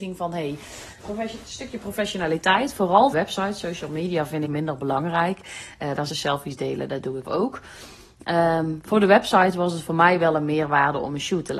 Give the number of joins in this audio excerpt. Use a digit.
5